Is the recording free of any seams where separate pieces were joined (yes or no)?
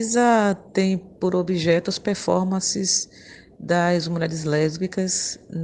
yes